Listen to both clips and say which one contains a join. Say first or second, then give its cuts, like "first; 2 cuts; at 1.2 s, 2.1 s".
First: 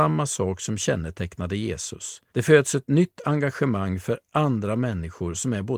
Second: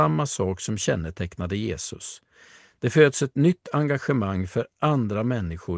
first; 1 cut; at 2.3 s